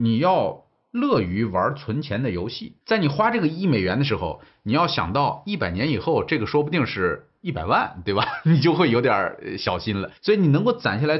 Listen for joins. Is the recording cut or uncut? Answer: cut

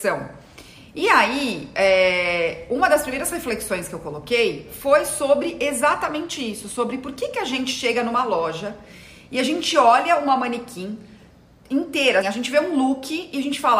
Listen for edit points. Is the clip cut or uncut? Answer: cut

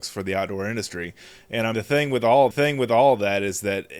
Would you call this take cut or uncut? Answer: cut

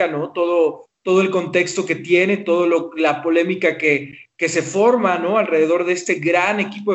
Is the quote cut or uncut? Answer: uncut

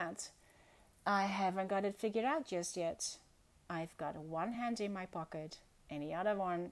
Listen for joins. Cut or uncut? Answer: uncut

